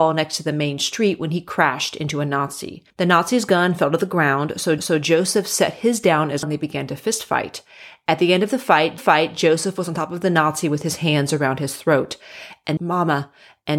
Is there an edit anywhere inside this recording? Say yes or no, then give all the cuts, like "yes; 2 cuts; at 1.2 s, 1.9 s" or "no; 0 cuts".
yes; 5 cuts; at 2.9 s, 4.8 s, 6.4 s, 9.0 s, 12.8 s